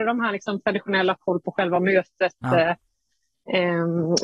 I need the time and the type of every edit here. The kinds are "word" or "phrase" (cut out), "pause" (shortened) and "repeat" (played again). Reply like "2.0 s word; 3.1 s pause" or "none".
1.1 s word

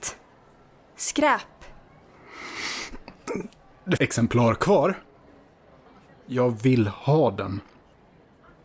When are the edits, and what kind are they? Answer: 4.0 s phrase; 5.9 s pause

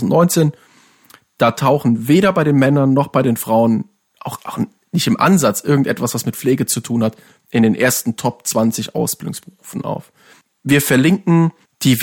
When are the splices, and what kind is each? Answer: none

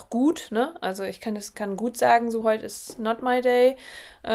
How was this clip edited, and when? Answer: 1.5 s word; 2.4 s word

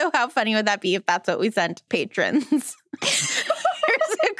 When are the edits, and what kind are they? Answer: 1.9 s phrase

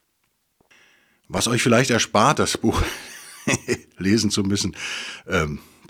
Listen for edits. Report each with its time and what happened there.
none

